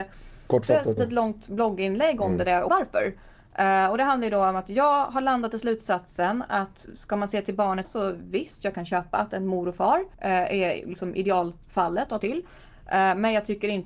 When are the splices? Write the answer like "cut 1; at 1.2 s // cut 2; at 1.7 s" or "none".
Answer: cut 1; at 1.0 s // cut 2; at 2.7 s // cut 3; at 7.8 s // cut 4; at 10.1 s // cut 5; at 12.2 s